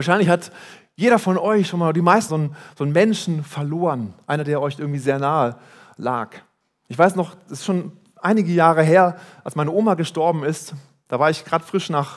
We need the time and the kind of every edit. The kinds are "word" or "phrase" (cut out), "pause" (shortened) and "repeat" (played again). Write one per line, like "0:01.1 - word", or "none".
0:02.3 - phrase